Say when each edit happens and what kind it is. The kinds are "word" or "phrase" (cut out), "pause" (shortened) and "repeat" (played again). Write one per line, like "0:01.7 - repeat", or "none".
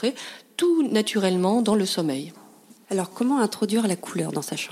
0:03.1 - word